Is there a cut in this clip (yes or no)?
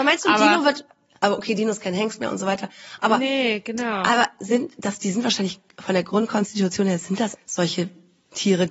yes